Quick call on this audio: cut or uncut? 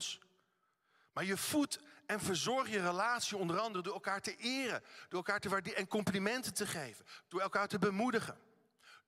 uncut